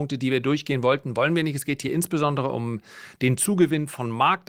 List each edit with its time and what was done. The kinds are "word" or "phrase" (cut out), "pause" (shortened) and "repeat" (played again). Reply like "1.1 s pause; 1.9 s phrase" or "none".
none